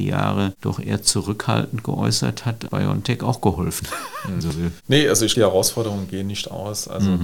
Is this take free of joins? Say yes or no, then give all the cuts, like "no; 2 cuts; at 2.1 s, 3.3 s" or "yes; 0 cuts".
no; 3 cuts; at 2.7 s, 4.4 s, 5.3 s